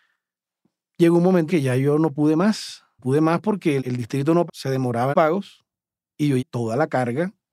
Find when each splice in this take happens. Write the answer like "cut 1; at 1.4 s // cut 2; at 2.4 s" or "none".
cut 1; at 1.5 s // cut 2; at 3.0 s // cut 3; at 3.8 s // cut 4; at 4.5 s // cut 5; at 5.1 s // cut 6; at 6.4 s